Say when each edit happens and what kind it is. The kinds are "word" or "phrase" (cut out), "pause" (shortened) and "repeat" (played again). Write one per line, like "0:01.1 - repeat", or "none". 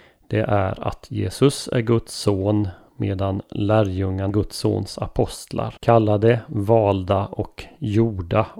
0:04.3 - word
0:05.8 - pause